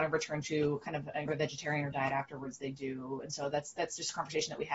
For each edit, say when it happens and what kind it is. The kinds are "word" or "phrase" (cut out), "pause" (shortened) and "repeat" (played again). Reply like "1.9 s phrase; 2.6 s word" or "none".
1.3 s word; 1.9 s word

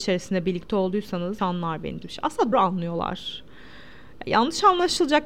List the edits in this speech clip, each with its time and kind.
1.4 s word; 2.0 s word; 2.5 s word

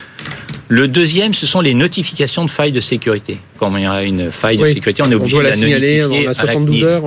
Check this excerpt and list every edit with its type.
3.6 s phrase

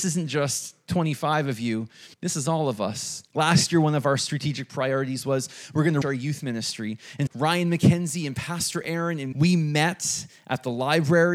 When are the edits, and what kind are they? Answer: 2.1 s pause; 3.3 s pause; 6.0 s word; 7.3 s word; 9.3 s word

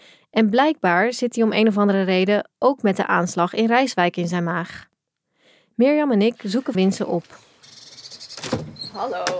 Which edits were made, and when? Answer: 6.7 s word

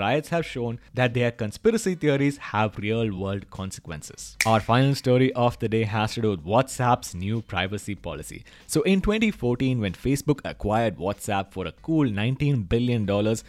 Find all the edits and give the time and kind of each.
none

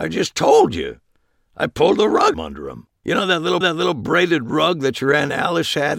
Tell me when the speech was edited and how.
2.3 s phrase; 3.0 s pause; 3.6 s repeat

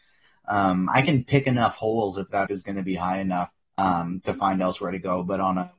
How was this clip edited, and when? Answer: 2.5 s word; 3.6 s pause

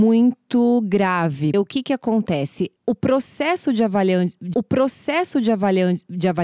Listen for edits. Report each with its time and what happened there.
1.5 s word; 2.8 s pause; 4.5 s repeat

